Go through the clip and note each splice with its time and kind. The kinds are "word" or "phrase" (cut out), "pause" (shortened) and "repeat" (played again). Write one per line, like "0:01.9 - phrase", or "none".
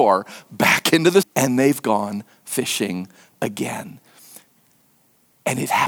0:01.2 - word